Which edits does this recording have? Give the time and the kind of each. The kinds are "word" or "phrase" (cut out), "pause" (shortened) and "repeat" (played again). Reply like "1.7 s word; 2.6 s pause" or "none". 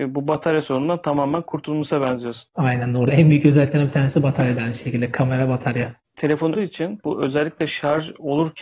6.5 s phrase